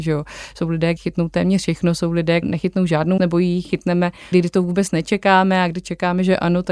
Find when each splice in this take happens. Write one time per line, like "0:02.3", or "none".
0:01.0
0:02.4
0:03.2
0:04.3